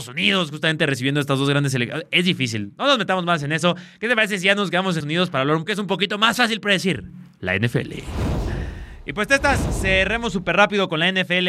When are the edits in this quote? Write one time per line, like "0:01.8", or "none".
0:05.0
0:05.7